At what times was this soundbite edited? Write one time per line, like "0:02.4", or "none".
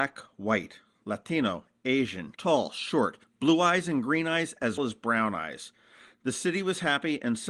0:02.4
0:04.8